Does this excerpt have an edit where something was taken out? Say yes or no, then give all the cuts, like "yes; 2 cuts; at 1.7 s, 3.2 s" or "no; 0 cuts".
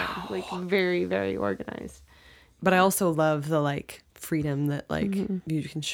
yes; 1 cut; at 4.1 s